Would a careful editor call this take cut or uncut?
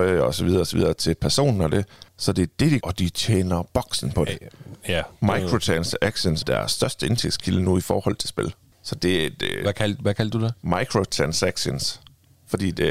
cut